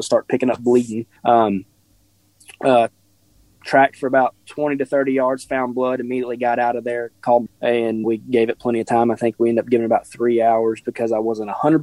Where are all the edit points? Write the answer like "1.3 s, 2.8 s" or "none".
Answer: 1.2 s, 7.5 s, 8.0 s, 10.8 s